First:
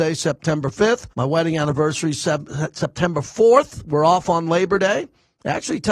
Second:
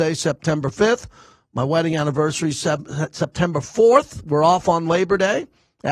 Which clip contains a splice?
first; 1 cut; at 1.1 s

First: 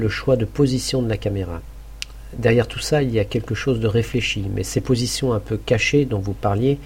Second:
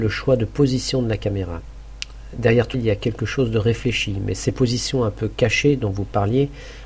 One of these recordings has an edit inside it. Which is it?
second; 1 cut; at 2.7 s

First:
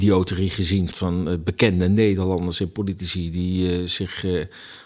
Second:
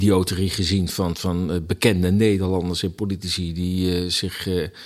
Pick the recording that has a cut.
first; 1 cut; at 0.9 s

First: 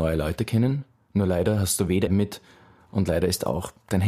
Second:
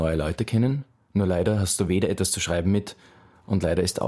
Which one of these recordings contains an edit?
first; 1 cut; at 2.1 s

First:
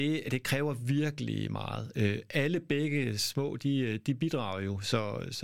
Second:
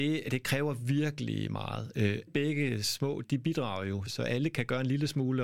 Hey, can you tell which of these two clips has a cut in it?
second; 3 cuts; at 2.3 s, 3.2 s, 4.1 s

